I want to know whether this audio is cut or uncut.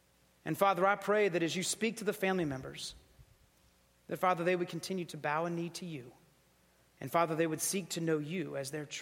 uncut